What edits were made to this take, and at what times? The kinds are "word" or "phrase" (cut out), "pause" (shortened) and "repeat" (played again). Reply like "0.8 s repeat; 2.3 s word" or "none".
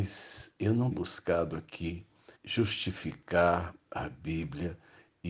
0.9 s word; 2.4 s pause

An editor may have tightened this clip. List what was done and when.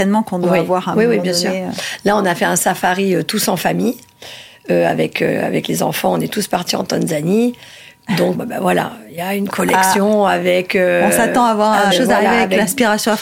8.3 s word; 11.9 s word

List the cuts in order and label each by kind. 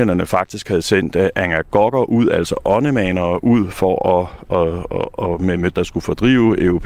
5.7 s word

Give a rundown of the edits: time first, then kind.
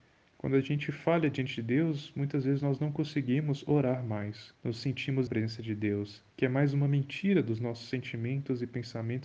4.6 s pause; 5.3 s phrase; 6.3 s pause

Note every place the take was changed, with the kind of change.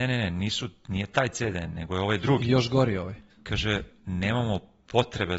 3.3 s pause

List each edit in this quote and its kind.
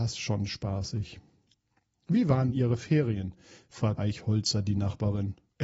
2.5 s word; 4.0 s word

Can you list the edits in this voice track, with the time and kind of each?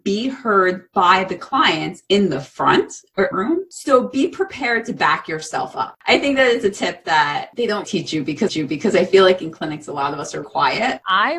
3.3 s phrase; 6.0 s pause; 7.8 s word; 8.5 s repeat; 10.4 s word

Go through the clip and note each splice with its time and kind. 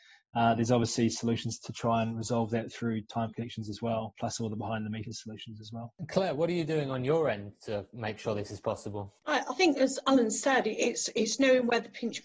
3.3 s phrase

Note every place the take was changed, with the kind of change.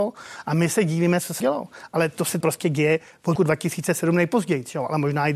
1.4 s word; 2.4 s word; 3.4 s word

